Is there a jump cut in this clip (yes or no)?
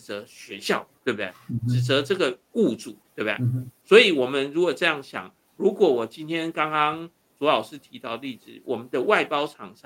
yes